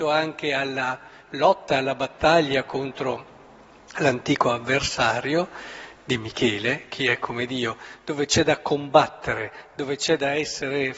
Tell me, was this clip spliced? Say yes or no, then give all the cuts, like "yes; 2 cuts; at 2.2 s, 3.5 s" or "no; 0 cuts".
no; 0 cuts